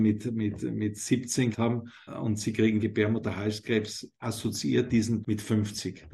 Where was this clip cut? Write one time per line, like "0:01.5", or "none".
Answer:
0:01.5
0:02.1
0:02.8
0:04.9
0:05.2